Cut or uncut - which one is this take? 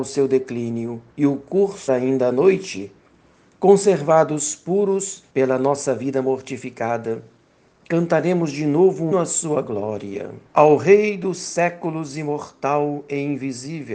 cut